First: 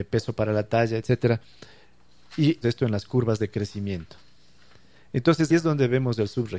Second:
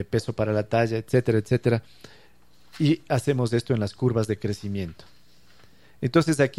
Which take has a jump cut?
first; 3 cuts; at 1.0 s, 2.6 s, 5.5 s

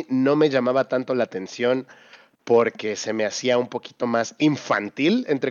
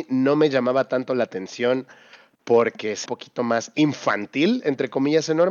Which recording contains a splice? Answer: second; 1 cut; at 3.1 s

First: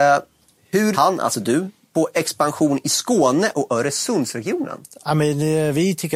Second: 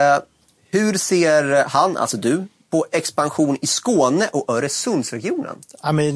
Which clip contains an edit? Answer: first; 1 cut; at 0.9 s

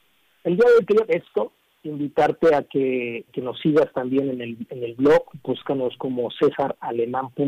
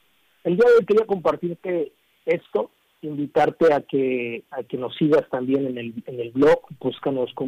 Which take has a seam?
first; 2 cuts; at 1.1 s, 3.3 s

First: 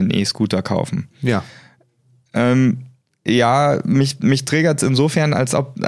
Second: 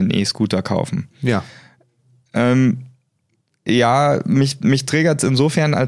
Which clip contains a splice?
first; 1 cut; at 3.0 s

